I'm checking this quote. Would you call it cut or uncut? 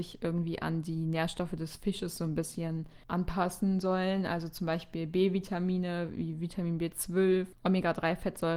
uncut